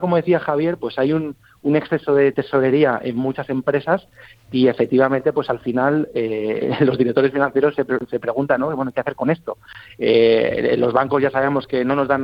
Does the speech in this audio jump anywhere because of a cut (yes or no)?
no